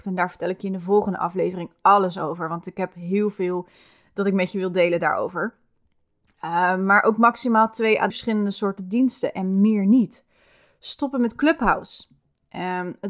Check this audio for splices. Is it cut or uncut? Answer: cut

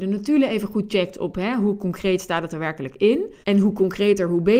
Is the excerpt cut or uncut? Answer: cut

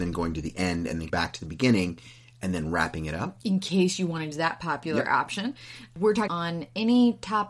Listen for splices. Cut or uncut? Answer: cut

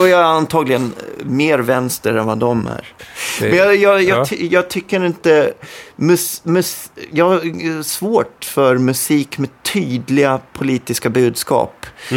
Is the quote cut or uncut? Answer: uncut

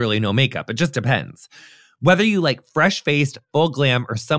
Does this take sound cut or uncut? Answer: uncut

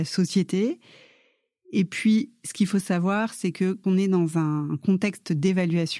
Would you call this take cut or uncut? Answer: cut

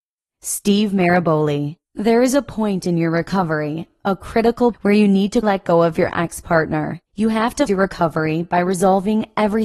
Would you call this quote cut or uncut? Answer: cut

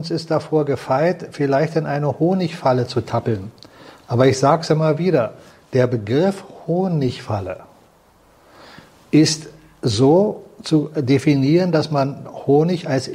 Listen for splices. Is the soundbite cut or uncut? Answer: uncut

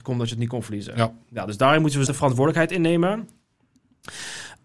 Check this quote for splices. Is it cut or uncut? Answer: cut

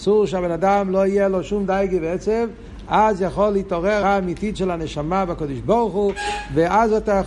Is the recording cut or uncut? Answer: cut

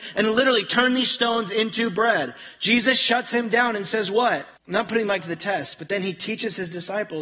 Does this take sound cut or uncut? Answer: cut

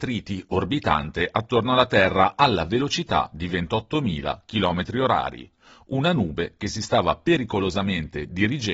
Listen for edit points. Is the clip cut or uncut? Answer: uncut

